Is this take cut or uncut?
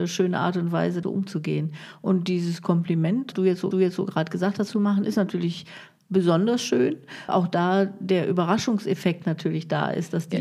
cut